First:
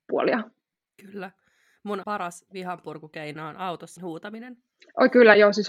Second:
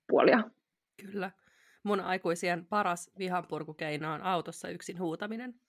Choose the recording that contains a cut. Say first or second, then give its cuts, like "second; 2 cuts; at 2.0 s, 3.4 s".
first; 2 cuts; at 2.0 s, 4.0 s